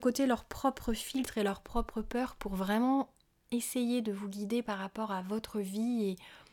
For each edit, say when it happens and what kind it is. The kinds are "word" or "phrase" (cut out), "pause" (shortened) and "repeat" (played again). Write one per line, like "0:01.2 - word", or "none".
none